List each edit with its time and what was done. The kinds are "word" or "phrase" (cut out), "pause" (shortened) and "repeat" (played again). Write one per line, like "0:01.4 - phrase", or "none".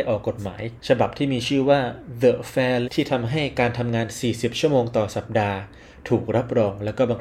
0:02.8 - phrase